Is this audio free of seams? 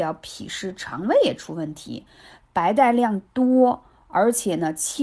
yes; 0 cuts

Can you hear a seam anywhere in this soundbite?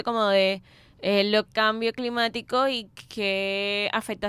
yes; 1 cut; at 1.5 s

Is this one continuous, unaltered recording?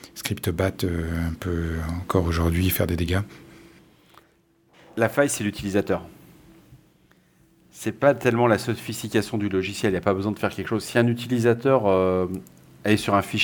yes; 0 cuts

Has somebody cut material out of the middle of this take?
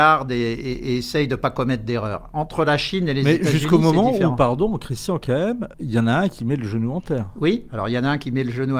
yes; 1 cut; at 5.7 s

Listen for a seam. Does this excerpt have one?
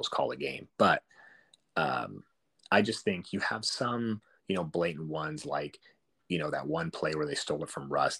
no; 0 cuts

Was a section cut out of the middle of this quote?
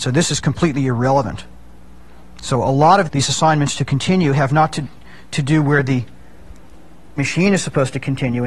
yes; 2 cuts; at 3.1 s, 7.2 s

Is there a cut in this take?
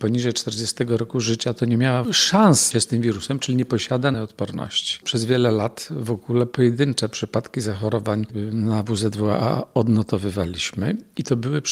yes; 3 cuts; at 2.0 s, 2.7 s, 4.1 s

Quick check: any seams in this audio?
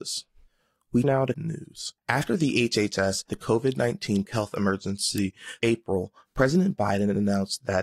yes; 6 cuts; at 1.0 s, 1.3 s, 2.0 s, 3.3 s, 4.2 s, 5.6 s

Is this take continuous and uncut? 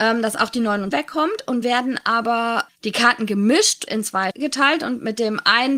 no; 5 cuts; at 0.9 s, 1.6 s, 2.7 s, 3.9 s, 4.3 s

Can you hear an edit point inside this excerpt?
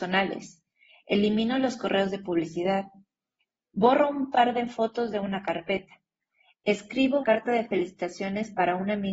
yes; 1 cut; at 7.2 s

